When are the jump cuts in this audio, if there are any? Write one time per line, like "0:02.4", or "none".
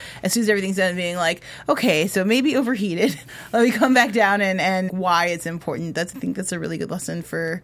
0:04.9